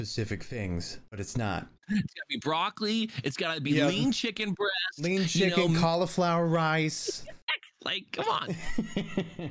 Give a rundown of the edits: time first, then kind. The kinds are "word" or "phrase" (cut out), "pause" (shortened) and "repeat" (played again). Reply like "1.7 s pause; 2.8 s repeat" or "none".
1.8 s pause